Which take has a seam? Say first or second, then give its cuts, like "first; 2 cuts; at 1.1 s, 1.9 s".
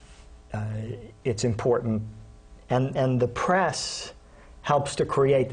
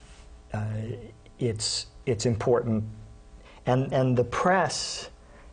first; 2 cuts; at 1.2 s, 2.6 s